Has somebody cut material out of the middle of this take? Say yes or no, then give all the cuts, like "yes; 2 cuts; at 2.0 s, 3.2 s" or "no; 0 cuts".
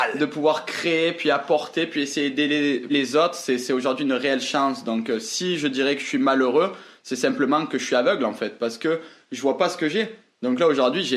yes; 1 cut; at 2.9 s